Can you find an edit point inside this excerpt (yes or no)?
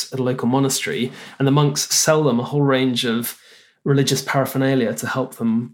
no